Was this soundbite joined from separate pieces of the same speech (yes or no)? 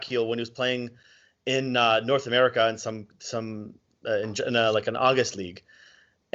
no